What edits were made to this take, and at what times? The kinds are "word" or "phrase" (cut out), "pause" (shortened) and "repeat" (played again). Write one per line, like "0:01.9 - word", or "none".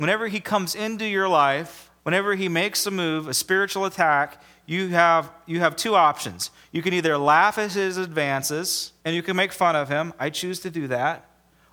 0:02.0 - pause
0:09.0 - pause